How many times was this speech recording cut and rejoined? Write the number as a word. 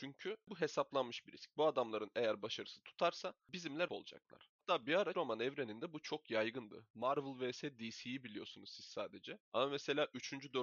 two